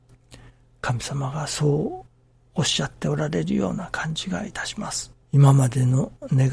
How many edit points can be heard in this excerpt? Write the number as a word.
one